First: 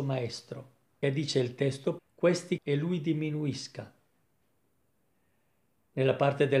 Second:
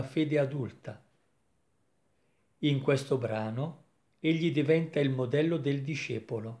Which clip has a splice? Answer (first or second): first